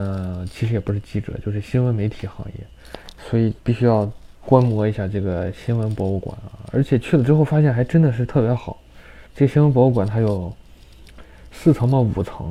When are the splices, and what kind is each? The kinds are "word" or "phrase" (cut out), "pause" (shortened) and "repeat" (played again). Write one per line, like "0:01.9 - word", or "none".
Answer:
0:03.6 - pause
0:09.3 - pause